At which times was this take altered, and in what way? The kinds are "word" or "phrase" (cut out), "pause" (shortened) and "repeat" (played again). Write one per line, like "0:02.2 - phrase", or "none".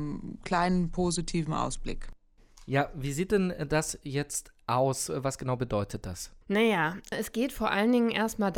0:06.4 - pause